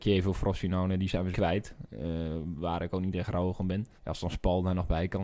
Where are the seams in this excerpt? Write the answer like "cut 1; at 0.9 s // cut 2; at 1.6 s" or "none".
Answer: cut 1; at 1.3 s // cut 2; at 4.0 s